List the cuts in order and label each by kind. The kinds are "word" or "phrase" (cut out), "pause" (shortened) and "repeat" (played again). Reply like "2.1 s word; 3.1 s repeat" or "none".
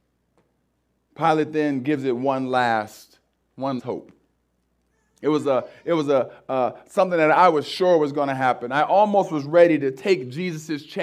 3.8 s word